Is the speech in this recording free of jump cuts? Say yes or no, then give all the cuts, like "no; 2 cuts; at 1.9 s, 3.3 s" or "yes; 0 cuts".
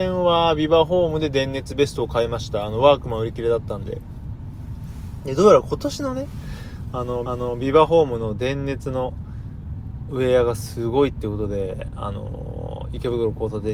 no; 1 cut; at 7.2 s